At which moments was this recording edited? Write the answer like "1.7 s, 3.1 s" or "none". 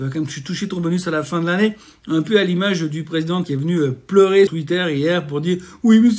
3.4 s, 4.5 s